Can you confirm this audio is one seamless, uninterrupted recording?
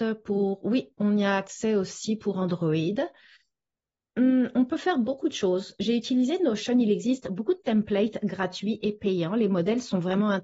yes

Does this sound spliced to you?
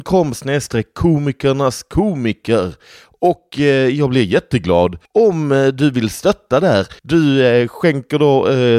yes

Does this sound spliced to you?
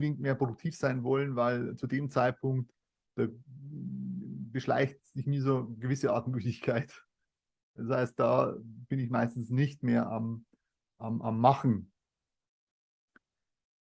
no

